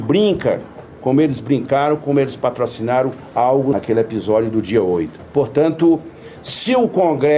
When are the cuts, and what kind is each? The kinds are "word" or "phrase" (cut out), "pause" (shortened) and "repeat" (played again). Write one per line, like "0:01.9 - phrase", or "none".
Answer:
none